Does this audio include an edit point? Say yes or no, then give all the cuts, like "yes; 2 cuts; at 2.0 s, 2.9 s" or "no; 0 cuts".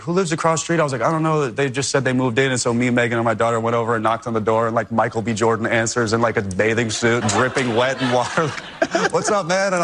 yes; 2 cuts; at 7.2 s, 8.5 s